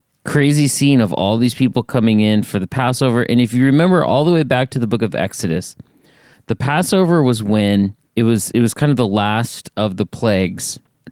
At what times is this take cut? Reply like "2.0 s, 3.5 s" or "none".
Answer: none